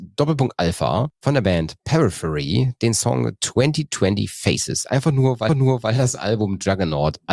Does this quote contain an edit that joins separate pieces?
yes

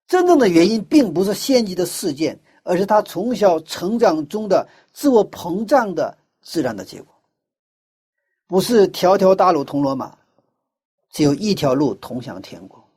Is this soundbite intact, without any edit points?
yes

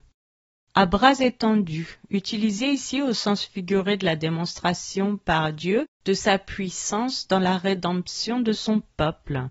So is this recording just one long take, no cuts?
no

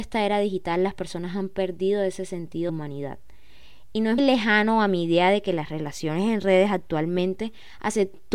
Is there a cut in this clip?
yes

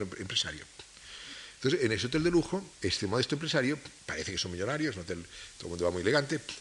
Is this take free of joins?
no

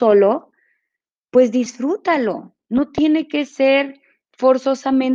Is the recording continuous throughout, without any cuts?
yes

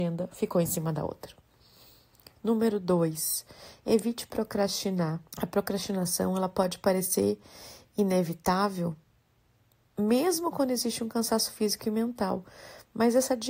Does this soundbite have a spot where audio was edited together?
yes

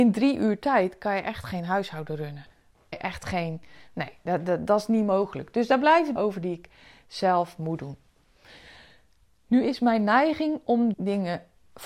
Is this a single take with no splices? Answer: no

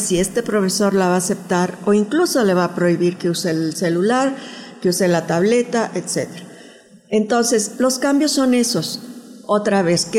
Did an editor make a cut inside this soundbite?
no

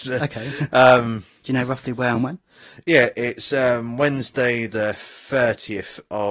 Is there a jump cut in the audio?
no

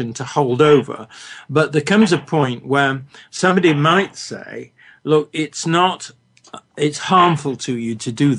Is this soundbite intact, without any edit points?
yes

